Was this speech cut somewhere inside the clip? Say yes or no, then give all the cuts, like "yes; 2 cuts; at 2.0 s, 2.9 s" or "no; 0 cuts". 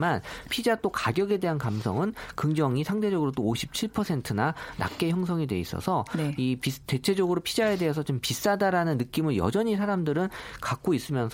no; 0 cuts